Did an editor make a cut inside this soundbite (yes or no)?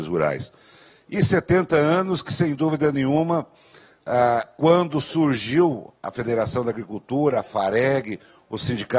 no